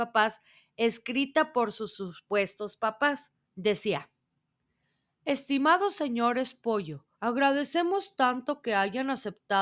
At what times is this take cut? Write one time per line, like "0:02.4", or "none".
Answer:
0:03.4
0:07.1